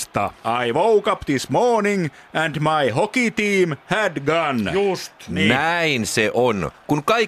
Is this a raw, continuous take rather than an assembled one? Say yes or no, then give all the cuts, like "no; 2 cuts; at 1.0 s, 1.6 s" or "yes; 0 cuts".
yes; 0 cuts